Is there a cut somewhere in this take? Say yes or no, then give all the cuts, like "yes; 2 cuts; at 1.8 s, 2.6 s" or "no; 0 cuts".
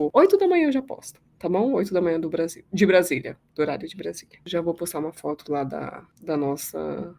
no; 0 cuts